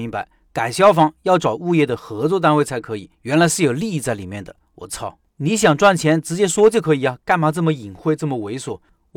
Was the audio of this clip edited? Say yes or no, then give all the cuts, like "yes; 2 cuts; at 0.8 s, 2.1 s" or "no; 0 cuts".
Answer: yes; 2 cuts; at 3.1 s, 5.3 s